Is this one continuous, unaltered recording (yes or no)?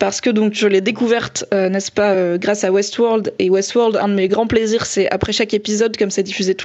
yes